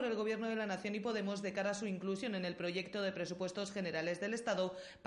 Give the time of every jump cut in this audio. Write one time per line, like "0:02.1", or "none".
none

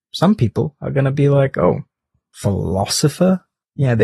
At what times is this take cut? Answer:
none

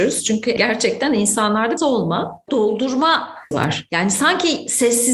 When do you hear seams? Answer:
0:01.8
0:02.5
0:03.5

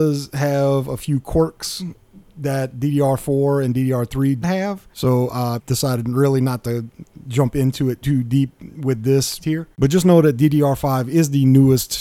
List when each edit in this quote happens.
0:02.0
0:04.4
0:04.9
0:05.6
0:08.0
0:09.4
0:09.7

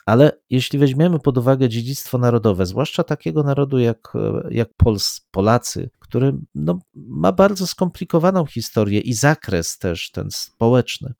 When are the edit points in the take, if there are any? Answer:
0:04.7
0:05.9

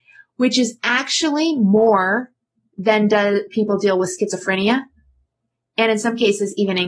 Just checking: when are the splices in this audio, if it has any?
0:03.5

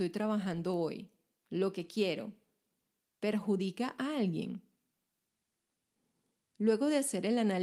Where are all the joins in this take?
none

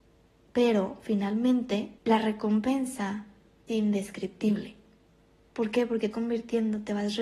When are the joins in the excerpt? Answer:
0:02.0
0:03.7
0:06.1

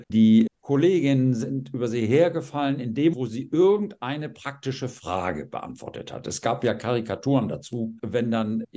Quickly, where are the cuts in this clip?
0:03.1

